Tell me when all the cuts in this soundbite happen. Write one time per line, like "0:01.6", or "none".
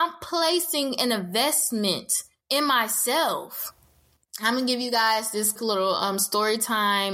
0:05.6

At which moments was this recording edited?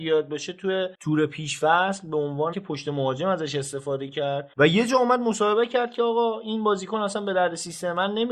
0:02.5

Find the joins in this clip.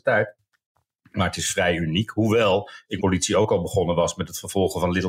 0:03.0

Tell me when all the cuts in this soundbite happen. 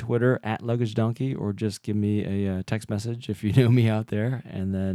none

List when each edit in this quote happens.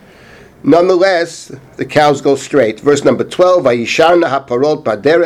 none

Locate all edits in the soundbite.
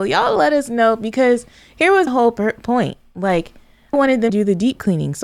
0:02.1
0:03.9
0:04.3

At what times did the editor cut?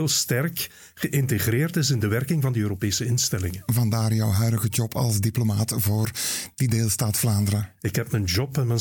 none

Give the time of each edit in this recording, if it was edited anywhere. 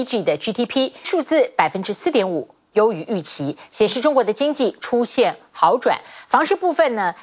0:01.0

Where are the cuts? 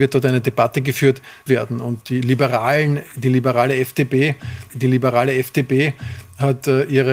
0:01.5
0:02.0
0:04.7

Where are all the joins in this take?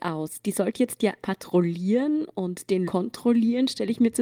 0:01.2
0:02.8

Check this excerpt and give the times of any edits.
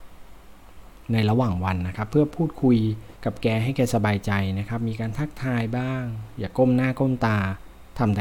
0:03.2

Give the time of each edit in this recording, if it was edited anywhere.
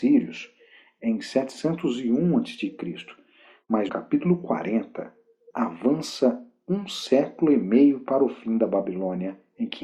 0:03.9
0:05.5

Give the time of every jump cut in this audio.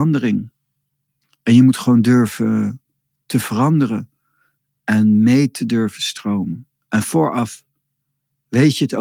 none

